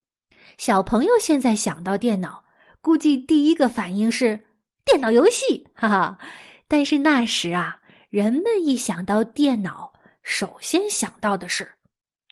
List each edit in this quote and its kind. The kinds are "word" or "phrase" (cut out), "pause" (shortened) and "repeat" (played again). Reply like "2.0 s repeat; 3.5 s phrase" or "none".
none